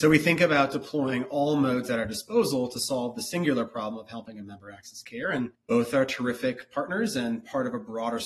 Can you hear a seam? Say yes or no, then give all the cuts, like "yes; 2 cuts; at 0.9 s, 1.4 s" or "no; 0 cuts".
yes; 1 cut; at 5.5 s